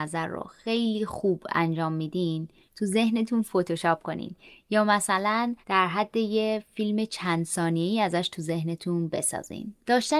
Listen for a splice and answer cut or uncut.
uncut